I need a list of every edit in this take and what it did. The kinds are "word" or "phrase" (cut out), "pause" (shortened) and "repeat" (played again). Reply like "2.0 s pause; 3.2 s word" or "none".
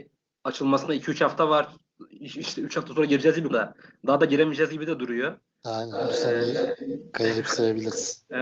3.5 s word